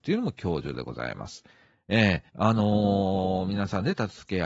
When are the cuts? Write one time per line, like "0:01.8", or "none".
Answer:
0:02.3

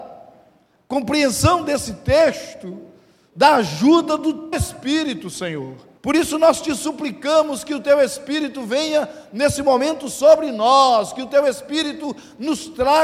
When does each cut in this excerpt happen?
0:04.5
0:06.0

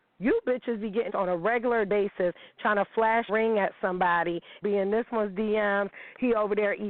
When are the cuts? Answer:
0:01.1
0:01.9
0:03.3
0:04.6

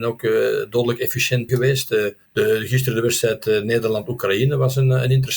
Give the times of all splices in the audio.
0:01.5
0:02.3

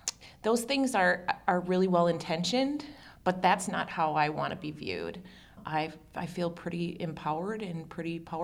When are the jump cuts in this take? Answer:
none

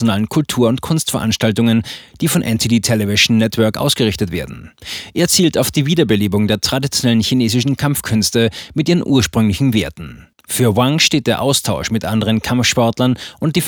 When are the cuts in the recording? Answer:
0:10.3

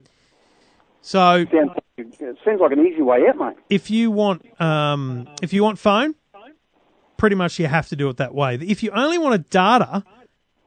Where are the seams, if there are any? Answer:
none

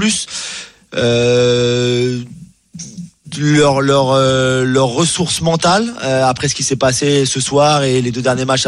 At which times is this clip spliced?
none

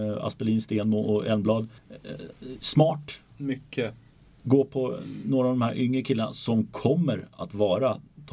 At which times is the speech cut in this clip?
0:01.8

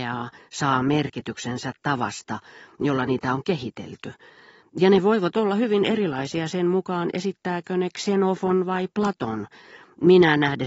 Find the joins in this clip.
none

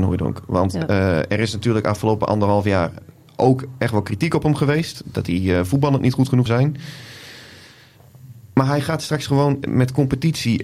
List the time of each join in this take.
0:06.5

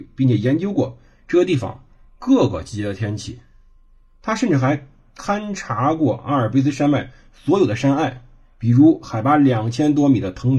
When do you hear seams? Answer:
none

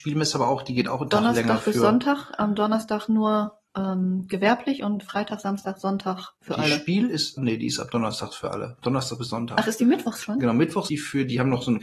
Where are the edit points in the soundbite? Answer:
0:03.7
0:06.4
0:07.4
0:10.9

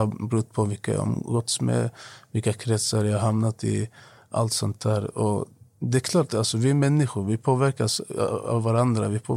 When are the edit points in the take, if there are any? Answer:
none

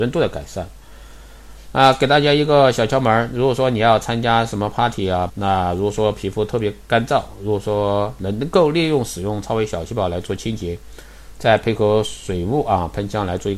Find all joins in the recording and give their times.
0:05.3

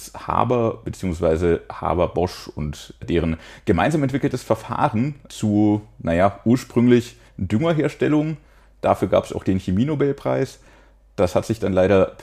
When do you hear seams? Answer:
none

